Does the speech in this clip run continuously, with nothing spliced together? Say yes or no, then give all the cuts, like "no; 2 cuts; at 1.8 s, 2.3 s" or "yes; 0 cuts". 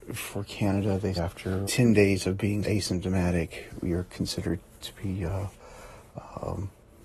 no; 3 cuts; at 1.2 s, 1.6 s, 2.6 s